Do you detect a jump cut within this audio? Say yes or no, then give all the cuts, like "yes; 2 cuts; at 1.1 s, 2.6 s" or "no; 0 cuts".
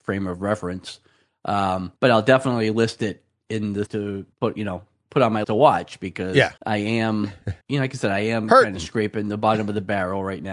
yes; 6 cuts; at 2.0 s, 3.9 s, 4.3 s, 5.4 s, 6.6 s, 7.6 s